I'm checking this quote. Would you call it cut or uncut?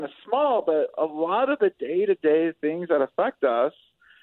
uncut